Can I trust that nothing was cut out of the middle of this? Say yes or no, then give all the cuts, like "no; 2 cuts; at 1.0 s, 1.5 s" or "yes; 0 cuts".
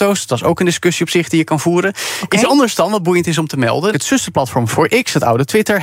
no; 2 cuts; at 3.9 s, 4.7 s